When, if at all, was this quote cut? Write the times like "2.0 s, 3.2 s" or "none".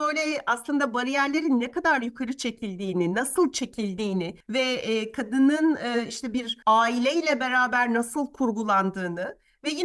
4.4 s, 6.6 s